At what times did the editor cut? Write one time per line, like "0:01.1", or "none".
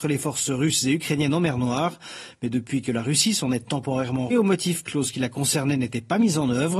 0:04.3
0:04.9